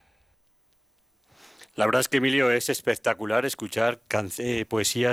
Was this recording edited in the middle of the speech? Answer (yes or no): no